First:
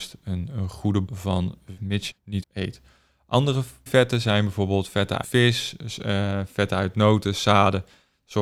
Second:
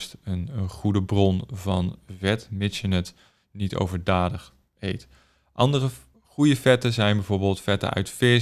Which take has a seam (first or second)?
first